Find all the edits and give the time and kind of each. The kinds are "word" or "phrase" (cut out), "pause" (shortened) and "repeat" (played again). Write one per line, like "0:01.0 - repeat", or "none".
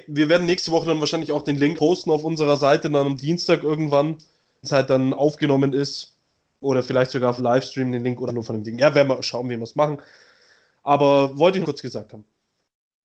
0:01.8 - word
0:04.6 - word
0:07.4 - word
0:08.3 - word
0:11.6 - word